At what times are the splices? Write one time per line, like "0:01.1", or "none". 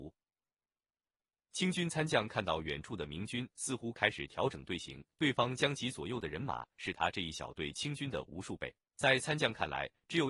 0:05.1